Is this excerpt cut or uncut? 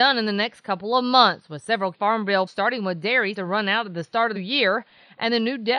cut